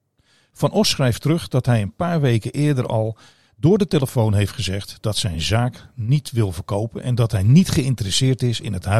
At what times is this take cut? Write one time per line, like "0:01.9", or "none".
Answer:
none